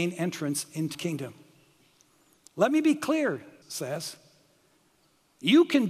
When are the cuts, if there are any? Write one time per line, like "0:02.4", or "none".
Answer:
0:00.9
0:03.6